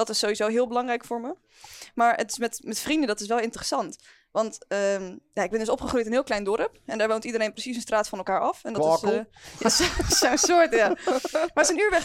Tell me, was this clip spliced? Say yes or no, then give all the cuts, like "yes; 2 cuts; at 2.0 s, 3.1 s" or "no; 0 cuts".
no; 0 cuts